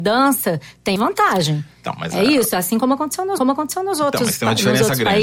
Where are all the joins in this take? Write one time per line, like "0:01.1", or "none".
0:01.0
0:03.4

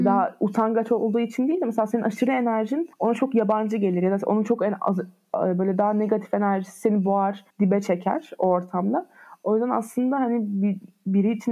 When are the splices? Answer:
0:02.9
0:07.5

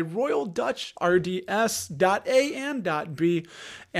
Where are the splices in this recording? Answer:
0:01.0

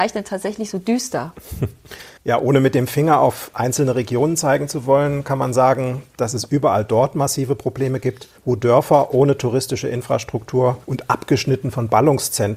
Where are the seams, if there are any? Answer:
0:02.2
0:08.4
0:10.8

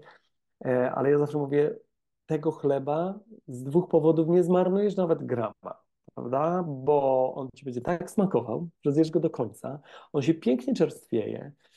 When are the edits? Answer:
none

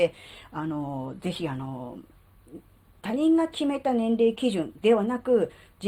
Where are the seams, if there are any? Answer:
none

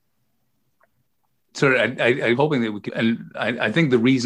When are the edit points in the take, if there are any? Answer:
0:02.3
0:02.9

